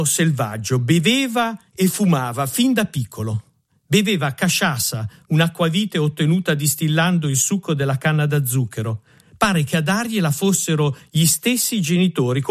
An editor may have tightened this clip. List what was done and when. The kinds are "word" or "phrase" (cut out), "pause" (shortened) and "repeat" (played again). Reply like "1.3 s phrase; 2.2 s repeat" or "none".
none